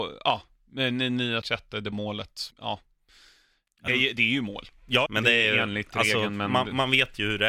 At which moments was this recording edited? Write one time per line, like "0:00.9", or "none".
0:01.4
0:01.9
0:02.5
0:03.9
0:05.1